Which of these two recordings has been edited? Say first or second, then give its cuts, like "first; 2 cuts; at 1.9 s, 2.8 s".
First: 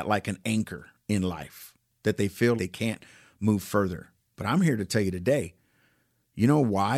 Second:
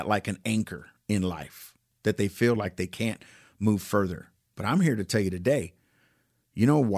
first; 1 cut; at 2.6 s